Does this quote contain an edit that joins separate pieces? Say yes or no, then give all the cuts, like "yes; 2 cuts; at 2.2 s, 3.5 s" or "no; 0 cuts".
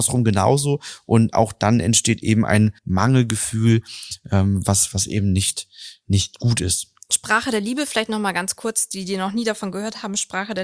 yes; 1 cut; at 2.8 s